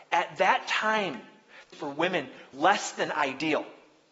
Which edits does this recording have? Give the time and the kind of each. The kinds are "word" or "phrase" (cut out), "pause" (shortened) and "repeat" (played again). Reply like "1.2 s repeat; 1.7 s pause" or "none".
1.7 s phrase; 2.5 s word

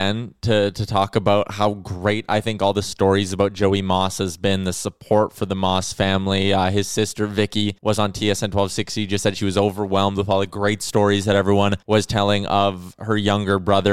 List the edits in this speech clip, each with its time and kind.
7.8 s pause; 11.8 s pause

